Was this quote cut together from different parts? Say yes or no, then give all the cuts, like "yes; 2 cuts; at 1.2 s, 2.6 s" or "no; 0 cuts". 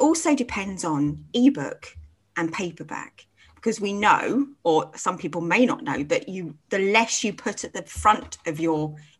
no; 0 cuts